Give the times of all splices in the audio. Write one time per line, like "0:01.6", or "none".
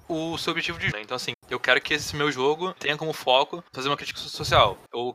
0:00.9
0:01.3
0:02.8
0:03.7